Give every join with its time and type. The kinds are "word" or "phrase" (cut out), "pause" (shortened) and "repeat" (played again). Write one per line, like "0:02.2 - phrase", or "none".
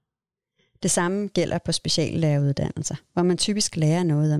none